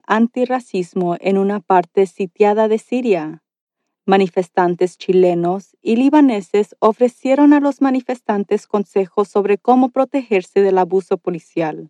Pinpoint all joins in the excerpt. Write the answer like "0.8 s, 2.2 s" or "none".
none

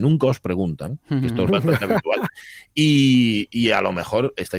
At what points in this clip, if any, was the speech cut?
1.5 s

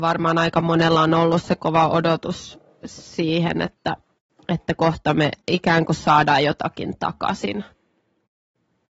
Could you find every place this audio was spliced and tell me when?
none

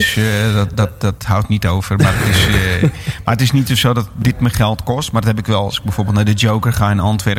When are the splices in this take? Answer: none

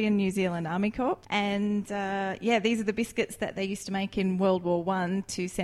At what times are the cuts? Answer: 1.2 s

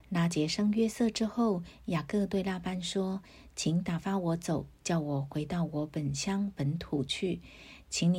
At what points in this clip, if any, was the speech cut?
4.7 s

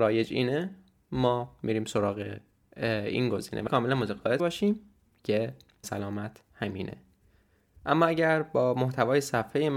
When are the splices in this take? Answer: 3.7 s, 4.4 s, 5.8 s

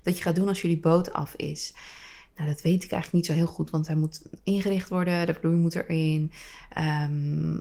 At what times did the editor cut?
none

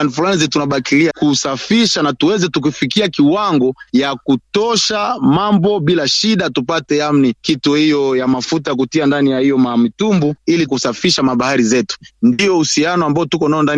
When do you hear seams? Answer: 1.1 s, 10.7 s

